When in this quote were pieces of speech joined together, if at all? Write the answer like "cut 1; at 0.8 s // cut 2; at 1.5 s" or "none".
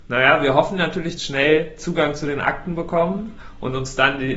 cut 1; at 1.2 s